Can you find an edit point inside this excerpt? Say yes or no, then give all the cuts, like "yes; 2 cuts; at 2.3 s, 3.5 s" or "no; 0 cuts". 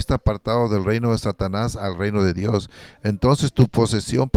no; 0 cuts